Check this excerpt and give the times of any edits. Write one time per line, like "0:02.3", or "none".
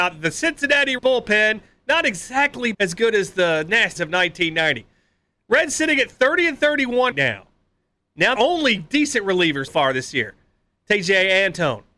0:01.0
0:02.7
0:04.0
0:07.1
0:08.4
0:09.7

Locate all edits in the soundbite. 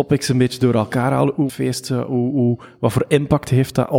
0:01.5

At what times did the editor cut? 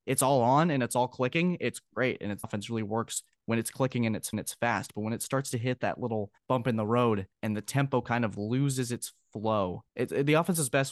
0:02.4
0:04.3
0:06.4
0:07.3
0:09.9

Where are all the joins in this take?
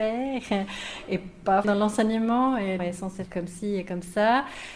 0:01.6
0:02.8
0:03.3

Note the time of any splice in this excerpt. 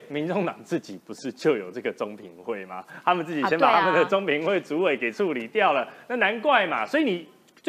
none

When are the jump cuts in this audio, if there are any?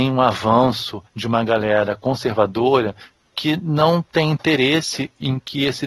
0:01.1

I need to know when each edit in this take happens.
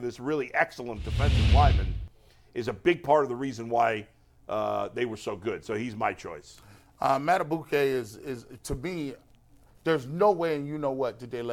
none

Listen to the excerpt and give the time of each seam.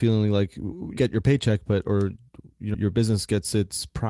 0:01.0
0:02.7

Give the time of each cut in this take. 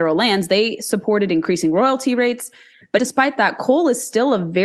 0:03.0

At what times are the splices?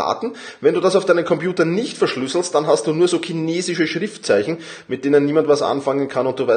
none

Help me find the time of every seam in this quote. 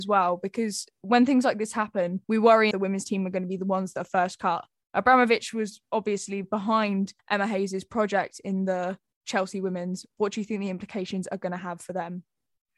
0:02.2
0:02.7
0:06.4
0:07.2

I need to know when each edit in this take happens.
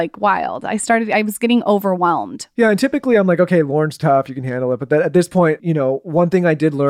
0:05.6

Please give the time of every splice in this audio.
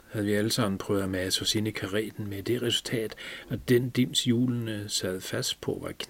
none

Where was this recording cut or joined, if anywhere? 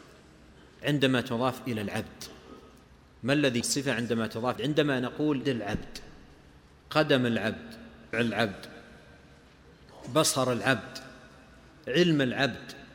0:03.6
0:04.6
0:05.4
0:08.1

